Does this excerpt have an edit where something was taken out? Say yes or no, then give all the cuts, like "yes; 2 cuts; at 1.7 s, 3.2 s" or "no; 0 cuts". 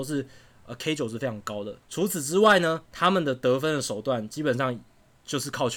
yes; 2 cuts; at 1.8 s, 2.9 s